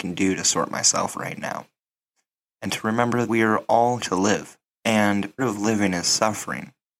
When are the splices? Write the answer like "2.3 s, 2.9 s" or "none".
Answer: 1.1 s, 3.3 s, 4.0 s, 5.4 s